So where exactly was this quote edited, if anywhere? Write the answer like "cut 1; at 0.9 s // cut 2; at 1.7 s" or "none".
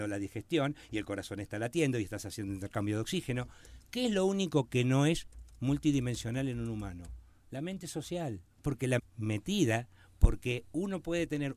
cut 1; at 8.5 s // cut 2; at 9.0 s